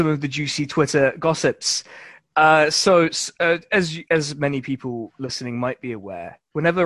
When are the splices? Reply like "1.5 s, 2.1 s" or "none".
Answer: none